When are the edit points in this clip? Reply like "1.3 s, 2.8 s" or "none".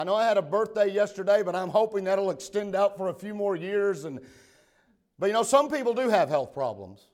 none